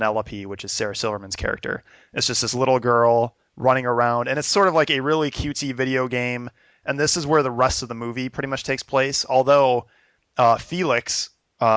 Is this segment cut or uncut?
uncut